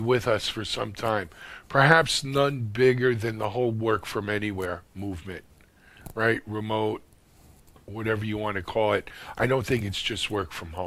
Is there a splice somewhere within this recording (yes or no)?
no